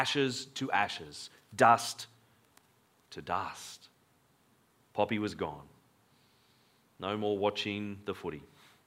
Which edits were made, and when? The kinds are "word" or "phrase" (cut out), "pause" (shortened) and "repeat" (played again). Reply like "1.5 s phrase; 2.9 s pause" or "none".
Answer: none